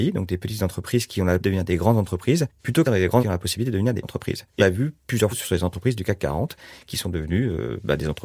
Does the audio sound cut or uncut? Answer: cut